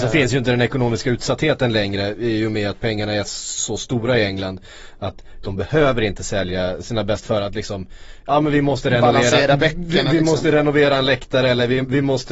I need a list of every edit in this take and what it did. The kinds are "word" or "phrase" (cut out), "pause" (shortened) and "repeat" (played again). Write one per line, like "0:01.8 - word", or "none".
0:07.2 - word